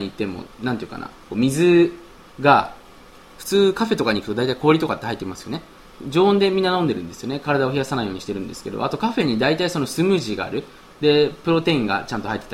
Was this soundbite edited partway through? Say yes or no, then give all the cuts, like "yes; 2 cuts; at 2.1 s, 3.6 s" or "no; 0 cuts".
no; 0 cuts